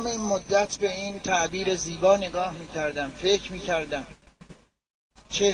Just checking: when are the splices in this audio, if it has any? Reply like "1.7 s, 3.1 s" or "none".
none